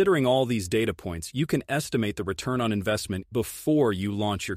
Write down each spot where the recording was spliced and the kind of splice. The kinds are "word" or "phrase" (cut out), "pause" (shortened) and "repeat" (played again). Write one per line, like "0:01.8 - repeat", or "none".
0:03.3 - word